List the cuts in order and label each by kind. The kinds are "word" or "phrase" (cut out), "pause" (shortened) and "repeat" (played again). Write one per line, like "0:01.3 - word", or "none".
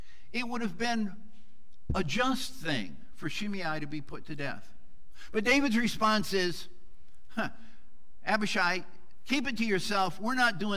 none